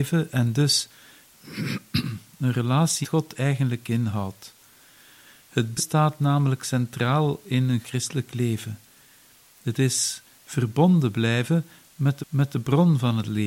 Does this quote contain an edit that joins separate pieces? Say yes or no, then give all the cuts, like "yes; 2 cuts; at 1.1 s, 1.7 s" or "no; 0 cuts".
yes; 4 cuts; at 3.0 s, 5.8 s, 7.8 s, 12.2 s